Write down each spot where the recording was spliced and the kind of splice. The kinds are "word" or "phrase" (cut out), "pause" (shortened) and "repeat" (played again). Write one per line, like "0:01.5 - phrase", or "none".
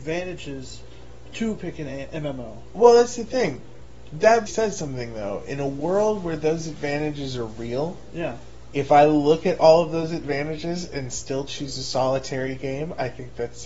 0:04.5 - word